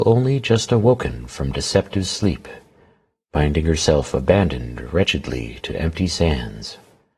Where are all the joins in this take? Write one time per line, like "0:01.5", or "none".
none